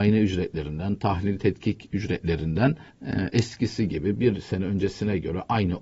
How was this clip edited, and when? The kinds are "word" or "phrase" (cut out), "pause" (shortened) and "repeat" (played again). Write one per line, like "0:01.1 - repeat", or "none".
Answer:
0:02.9 - pause